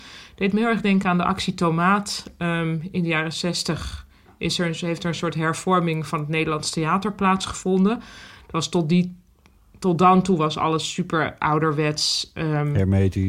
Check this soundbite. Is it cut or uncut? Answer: uncut